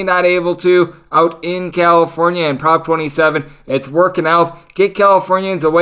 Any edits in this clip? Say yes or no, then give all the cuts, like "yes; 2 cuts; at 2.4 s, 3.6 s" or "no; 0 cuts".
no; 0 cuts